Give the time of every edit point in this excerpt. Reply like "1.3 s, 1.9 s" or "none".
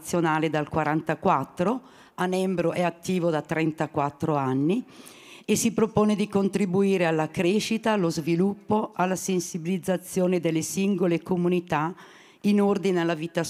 none